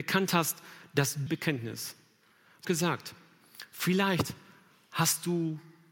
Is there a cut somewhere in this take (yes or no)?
yes